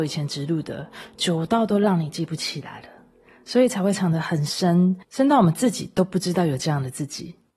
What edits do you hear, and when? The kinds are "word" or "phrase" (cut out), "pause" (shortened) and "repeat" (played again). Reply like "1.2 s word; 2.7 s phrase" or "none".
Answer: 5.0 s pause